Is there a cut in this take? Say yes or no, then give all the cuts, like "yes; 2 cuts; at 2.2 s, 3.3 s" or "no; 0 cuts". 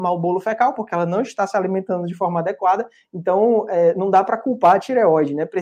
no; 0 cuts